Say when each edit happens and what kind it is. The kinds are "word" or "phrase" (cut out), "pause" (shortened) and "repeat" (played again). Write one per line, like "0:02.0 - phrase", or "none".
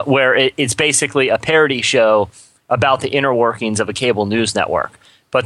none